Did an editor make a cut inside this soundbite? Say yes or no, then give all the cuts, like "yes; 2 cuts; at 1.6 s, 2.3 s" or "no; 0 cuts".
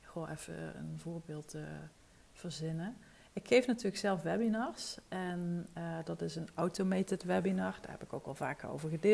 no; 0 cuts